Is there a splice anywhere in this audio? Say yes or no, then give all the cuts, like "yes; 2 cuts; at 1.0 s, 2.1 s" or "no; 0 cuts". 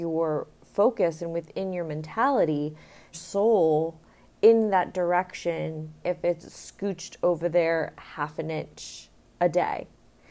yes; 3 cuts; at 3.1 s, 6.0 s, 6.4 s